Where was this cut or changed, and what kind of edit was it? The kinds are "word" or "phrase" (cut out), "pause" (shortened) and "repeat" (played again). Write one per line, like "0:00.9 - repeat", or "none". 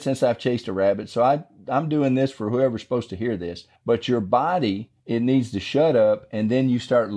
0:03.8 - pause
0:05.0 - pause